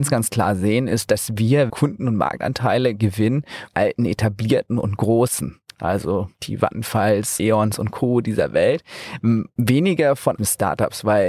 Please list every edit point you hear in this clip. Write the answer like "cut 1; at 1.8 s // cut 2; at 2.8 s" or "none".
cut 1; at 1.7 s // cut 2; at 3.7 s // cut 3; at 6.3 s // cut 4; at 7.4 s // cut 5; at 10.4 s

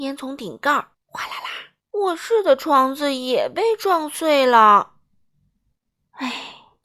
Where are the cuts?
cut 1; at 0.9 s // cut 2; at 1.8 s

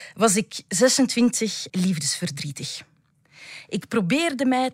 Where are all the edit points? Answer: cut 1; at 1.7 s

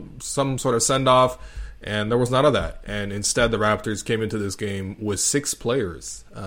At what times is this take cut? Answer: none

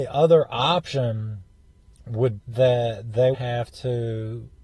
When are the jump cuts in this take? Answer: cut 1; at 2.4 s // cut 2; at 3.3 s

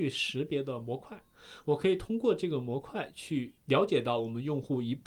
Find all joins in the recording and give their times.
cut 1; at 3.6 s

